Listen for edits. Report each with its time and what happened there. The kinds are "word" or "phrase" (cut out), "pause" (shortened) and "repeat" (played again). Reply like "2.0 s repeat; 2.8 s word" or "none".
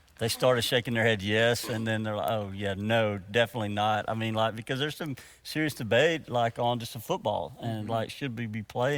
none